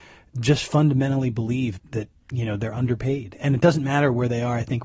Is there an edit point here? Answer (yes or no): yes